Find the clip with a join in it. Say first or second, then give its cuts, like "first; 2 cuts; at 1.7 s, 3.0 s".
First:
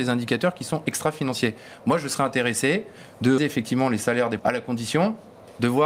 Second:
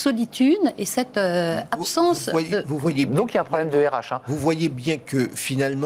first; 2 cuts; at 3.4 s, 4.4 s